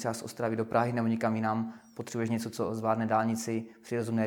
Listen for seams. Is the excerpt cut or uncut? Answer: uncut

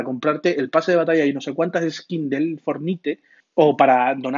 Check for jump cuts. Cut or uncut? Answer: cut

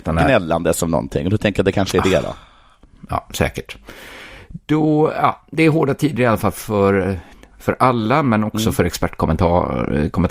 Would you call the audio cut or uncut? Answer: uncut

